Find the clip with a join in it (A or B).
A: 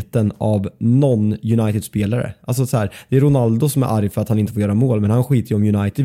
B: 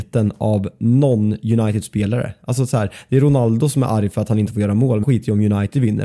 B